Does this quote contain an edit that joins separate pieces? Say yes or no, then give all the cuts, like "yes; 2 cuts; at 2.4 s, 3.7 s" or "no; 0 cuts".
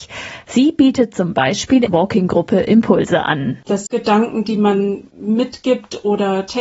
yes; 2 cuts; at 1.9 s, 3.9 s